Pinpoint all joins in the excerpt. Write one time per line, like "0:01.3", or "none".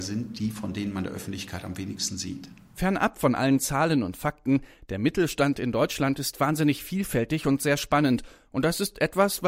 none